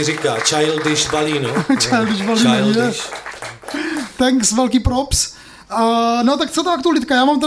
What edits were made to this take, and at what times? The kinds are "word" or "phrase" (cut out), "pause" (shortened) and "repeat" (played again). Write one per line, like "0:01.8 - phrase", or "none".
none